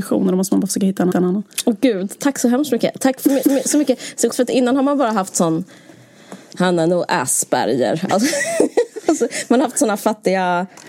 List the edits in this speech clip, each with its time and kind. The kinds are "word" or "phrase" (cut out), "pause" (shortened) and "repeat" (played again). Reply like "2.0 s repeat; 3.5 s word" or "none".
1.1 s repeat; 3.4 s repeat; 4.3 s word